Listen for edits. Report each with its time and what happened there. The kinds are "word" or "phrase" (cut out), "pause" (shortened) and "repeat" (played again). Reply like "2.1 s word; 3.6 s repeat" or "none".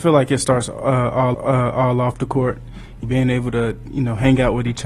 1.3 s repeat; 3.0 s word